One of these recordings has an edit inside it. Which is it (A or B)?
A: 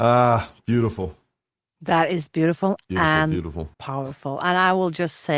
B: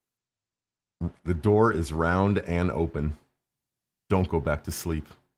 A